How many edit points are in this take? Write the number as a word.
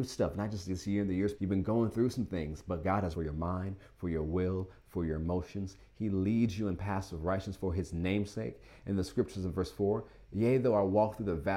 two